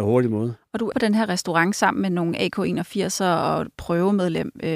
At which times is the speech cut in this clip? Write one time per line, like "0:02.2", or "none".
0:00.9